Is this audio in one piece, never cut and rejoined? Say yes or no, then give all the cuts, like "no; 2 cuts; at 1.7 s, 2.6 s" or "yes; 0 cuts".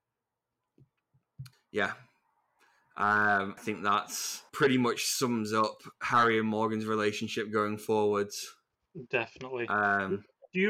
no; 3 cuts; at 1.5 s, 3.6 s, 4.5 s